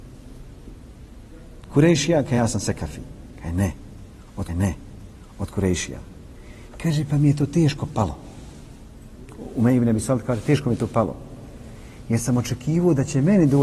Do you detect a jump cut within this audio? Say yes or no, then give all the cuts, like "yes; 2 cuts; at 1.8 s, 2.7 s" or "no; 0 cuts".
yes; 2 cuts; at 2.4 s, 4.5 s